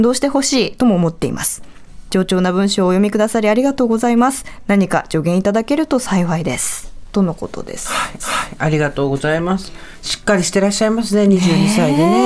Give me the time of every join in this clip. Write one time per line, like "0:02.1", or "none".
0:08.2